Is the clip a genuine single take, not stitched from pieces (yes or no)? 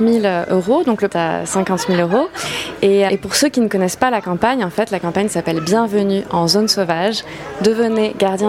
no